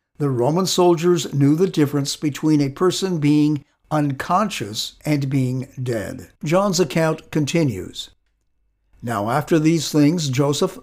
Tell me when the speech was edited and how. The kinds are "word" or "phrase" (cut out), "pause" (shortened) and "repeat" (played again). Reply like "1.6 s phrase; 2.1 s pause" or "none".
5.0 s pause; 6.4 s pause